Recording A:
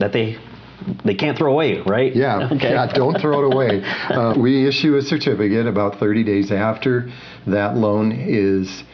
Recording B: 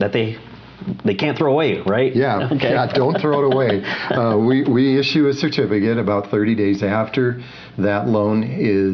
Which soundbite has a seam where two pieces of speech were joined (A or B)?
A